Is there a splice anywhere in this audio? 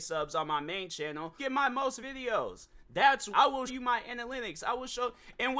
yes; 4 cuts; at 1.4 s, 2.0 s, 3.3 s, 3.7 s

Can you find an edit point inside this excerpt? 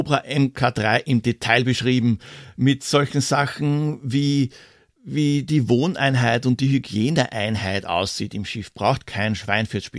no; 0 cuts

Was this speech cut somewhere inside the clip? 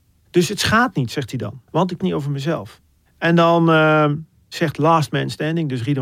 yes; 2 cuts; at 1.7 s, 2.0 s

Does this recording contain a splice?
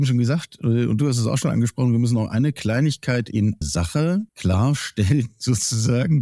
yes; 2 cuts; at 3.6 s, 4.3 s

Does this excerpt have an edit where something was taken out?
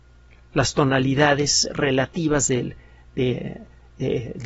no; 0 cuts

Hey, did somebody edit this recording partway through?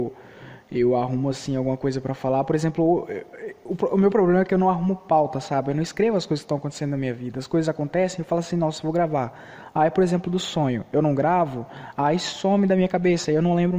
no; 0 cuts

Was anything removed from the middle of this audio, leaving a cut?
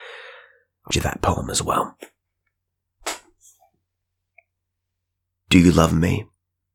yes; 1 cut; at 0.9 s

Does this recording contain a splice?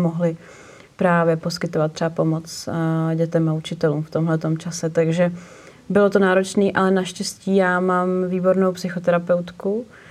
no; 0 cuts

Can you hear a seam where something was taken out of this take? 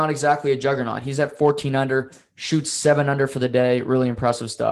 no; 0 cuts

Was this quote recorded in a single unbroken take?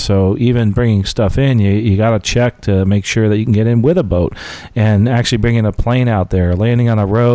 yes; 0 cuts

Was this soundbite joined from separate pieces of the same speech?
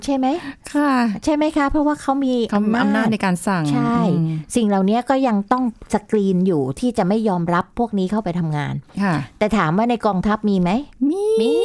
no; 0 cuts

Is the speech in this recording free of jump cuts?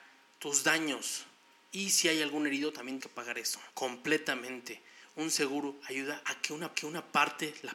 no; 2 cuts; at 3.0 s, 6.7 s

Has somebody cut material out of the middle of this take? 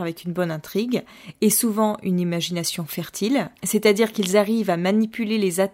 no; 0 cuts

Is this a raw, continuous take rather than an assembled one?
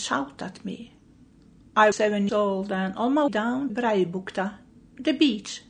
no; 4 cuts; at 1.9 s, 2.3 s, 3.3 s, 3.7 s

